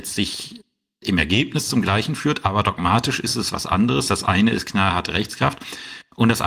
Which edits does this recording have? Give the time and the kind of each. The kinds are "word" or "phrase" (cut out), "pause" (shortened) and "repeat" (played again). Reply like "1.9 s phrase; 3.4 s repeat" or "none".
none